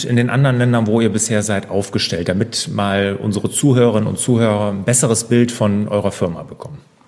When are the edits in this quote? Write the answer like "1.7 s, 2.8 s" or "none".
none